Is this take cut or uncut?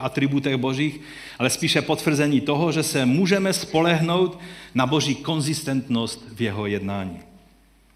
uncut